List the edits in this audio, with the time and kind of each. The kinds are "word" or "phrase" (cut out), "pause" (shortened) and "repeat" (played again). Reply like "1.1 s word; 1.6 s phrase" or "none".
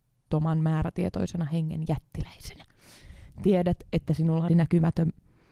4.5 s word